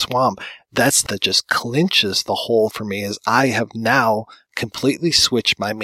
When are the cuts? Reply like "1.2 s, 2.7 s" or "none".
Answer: 1.1 s, 2.7 s